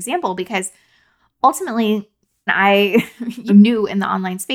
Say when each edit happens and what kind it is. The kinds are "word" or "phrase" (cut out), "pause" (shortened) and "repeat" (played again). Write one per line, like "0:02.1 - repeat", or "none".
0:02.5 - word
0:03.5 - word